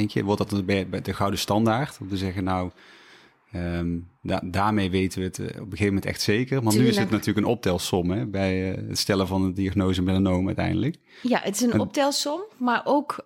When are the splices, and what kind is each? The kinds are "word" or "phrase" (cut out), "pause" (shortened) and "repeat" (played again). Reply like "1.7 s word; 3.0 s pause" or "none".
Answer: none